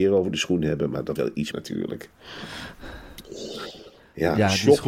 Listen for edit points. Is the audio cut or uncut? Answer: cut